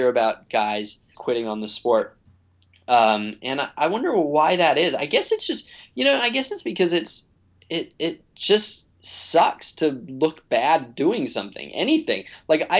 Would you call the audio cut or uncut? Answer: cut